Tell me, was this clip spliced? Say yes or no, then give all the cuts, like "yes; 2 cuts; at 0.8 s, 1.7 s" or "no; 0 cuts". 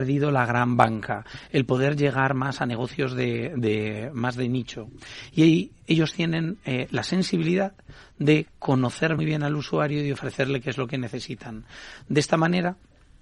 yes; 1 cut; at 9.2 s